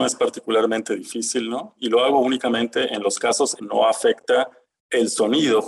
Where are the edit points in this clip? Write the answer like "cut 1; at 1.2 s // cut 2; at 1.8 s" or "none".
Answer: cut 1; at 3.6 s